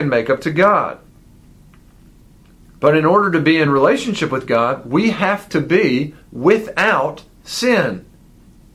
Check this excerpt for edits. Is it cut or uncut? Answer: uncut